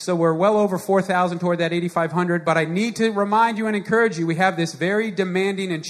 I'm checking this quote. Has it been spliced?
no; 0 cuts

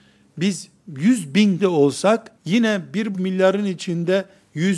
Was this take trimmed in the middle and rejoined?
yes; 3 cuts; at 1.6 s, 2.4 s, 3.1 s

